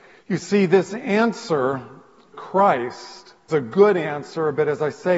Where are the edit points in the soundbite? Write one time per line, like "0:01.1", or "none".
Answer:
0:02.3
0:03.5